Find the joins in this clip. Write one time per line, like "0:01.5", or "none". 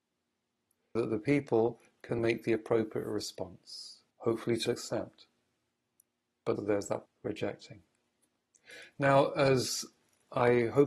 0:01.0
0:02.2
0:04.1
0:04.7
0:06.6
0:07.1